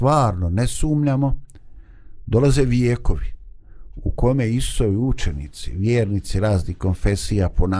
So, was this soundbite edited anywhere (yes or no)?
no